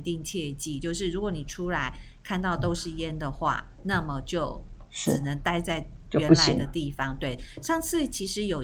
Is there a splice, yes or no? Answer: no